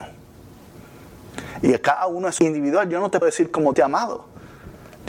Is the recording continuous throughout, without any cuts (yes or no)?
no